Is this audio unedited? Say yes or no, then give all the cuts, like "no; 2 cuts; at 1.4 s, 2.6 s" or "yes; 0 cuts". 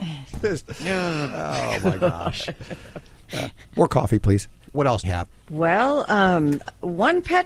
no; 2 cuts; at 4.6 s, 5.0 s